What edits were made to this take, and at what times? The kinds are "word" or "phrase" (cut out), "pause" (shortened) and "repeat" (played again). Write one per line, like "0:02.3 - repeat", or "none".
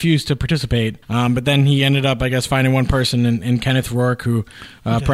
0:01.0 - pause